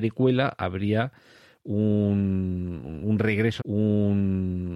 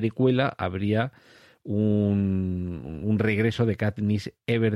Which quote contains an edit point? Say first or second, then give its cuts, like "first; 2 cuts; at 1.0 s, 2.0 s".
first; 1 cut; at 3.6 s